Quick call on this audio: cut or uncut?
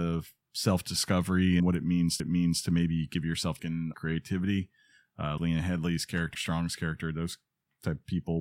cut